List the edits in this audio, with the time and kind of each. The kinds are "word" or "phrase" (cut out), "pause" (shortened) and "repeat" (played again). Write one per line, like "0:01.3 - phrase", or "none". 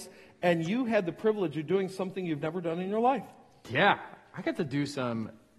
none

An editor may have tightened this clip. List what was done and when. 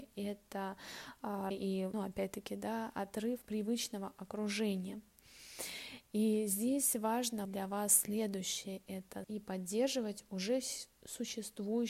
0:01.5 - word
0:01.9 - word
0:03.4 - word
0:07.4 - word
0:09.2 - word

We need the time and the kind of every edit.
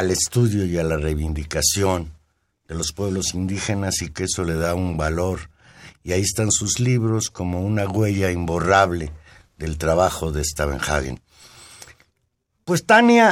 0:04.1 - word

